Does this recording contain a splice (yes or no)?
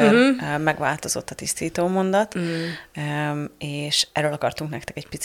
no